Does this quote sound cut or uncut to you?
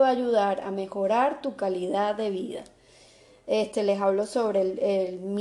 uncut